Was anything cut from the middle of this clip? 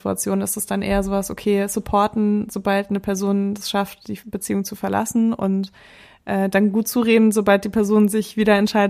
no; 0 cuts

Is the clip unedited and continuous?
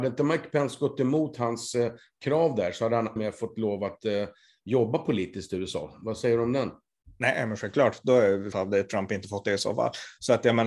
no; 2 cuts; at 3.2 s, 8.5 s

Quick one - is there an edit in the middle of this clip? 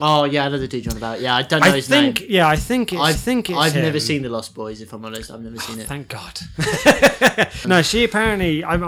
yes; 2 cuts; at 3.2 s, 7.6 s

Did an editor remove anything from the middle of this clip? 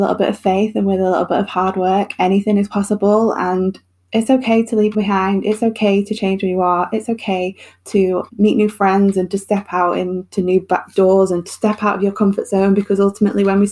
yes; 2 cuts; at 4.9 s, 8.3 s

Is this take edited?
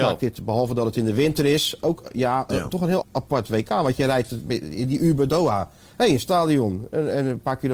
yes; 2 cuts; at 3.0 s, 5.3 s

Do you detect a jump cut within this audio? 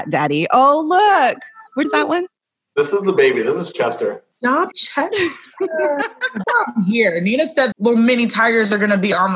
yes; 4 cuts; at 1.8 s, 4.7 s, 6.4 s, 7.7 s

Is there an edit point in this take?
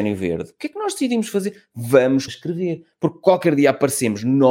yes; 1 cut; at 2.3 s

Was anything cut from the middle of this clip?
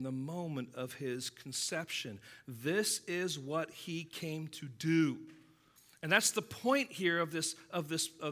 no; 0 cuts

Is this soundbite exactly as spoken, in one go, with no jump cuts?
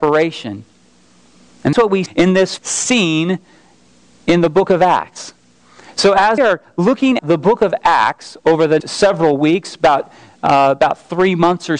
no; 6 cuts; at 1.7 s, 2.1 s, 2.6 s, 6.4 s, 7.2 s, 8.8 s

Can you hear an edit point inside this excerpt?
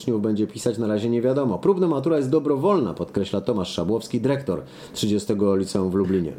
no; 0 cuts

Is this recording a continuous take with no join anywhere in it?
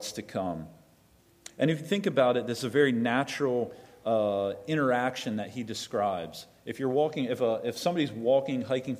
yes; 0 cuts

